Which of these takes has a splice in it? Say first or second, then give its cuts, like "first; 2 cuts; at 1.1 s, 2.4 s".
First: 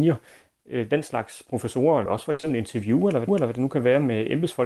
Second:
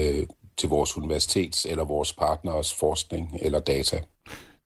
first; 2 cuts; at 2.1 s, 3.3 s